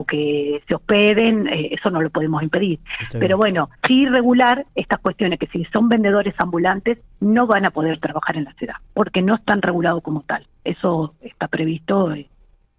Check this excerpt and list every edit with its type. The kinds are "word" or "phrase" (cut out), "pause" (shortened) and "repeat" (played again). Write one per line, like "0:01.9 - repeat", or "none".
0:03.8 - pause